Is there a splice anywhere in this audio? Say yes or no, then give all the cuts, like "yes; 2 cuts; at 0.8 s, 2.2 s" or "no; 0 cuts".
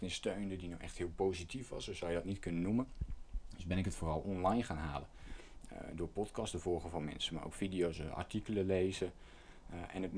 no; 0 cuts